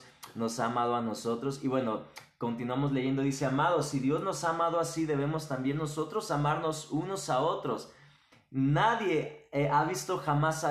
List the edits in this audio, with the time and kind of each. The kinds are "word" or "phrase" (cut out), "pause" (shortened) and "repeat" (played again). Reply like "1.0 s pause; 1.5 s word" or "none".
none